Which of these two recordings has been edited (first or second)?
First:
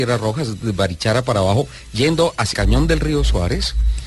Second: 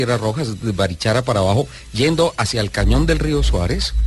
first